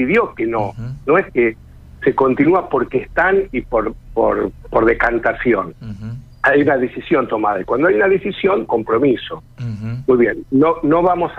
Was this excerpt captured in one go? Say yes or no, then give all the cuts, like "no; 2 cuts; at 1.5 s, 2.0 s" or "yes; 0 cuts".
no; 3 cuts; at 4.6 s, 6.3 s, 8.7 s